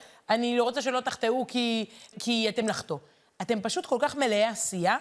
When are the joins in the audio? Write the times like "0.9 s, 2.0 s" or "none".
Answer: 2.1 s, 2.6 s